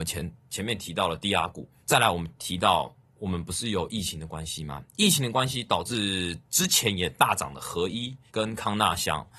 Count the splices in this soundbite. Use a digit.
2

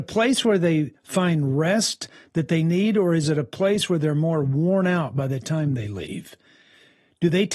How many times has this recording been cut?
0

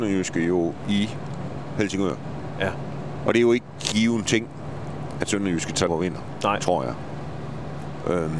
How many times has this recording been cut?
2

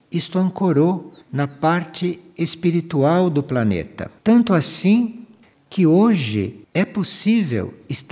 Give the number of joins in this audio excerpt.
3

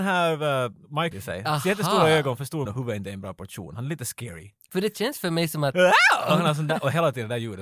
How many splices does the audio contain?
2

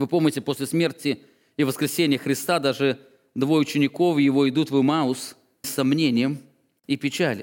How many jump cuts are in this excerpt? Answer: 1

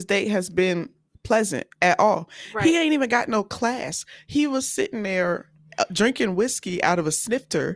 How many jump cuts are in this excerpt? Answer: 0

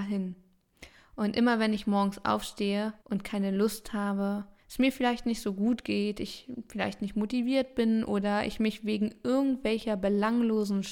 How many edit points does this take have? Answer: 1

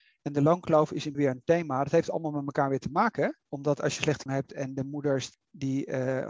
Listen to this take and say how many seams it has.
3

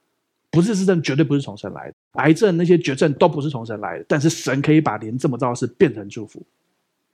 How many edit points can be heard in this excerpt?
1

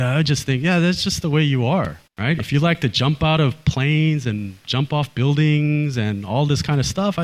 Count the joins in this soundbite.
1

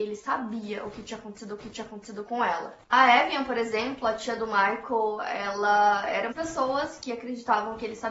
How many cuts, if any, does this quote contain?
3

